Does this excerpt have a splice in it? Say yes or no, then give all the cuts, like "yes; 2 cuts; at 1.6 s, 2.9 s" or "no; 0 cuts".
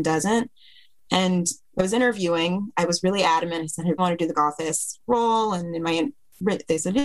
yes; 2 cuts; at 4.0 s, 4.3 s